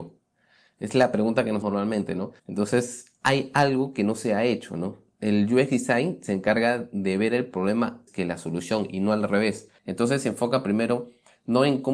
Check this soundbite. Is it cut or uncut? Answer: cut